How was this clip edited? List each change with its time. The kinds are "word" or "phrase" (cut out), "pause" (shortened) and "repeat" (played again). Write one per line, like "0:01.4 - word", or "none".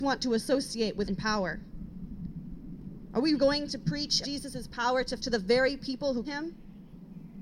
0:01.1 - word
0:03.3 - word
0:04.2 - word
0:05.2 - word
0:06.2 - word